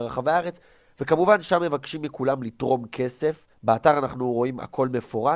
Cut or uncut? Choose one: cut